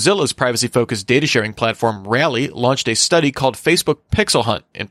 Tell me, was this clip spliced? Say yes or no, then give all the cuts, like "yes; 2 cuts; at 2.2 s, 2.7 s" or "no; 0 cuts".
no; 0 cuts